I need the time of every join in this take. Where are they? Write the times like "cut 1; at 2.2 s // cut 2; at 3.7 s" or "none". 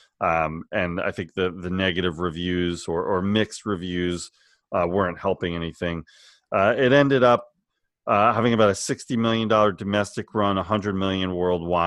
none